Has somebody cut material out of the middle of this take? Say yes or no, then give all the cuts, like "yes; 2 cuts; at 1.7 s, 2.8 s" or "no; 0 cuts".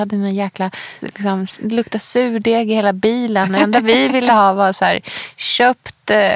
yes; 1 cut; at 1.0 s